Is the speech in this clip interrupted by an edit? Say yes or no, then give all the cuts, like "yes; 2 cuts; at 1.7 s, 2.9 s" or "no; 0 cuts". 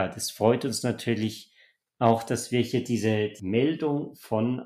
no; 0 cuts